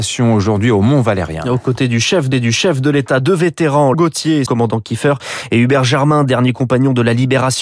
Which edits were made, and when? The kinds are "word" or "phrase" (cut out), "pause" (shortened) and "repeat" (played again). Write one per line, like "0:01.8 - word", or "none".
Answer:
0:02.3 - repeat
0:03.9 - word
0:04.5 - phrase